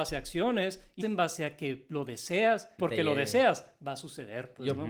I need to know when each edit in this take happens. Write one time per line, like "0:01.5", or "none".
0:01.0
0:02.8